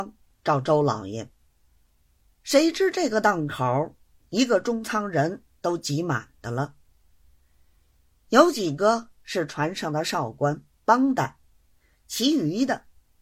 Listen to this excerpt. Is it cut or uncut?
uncut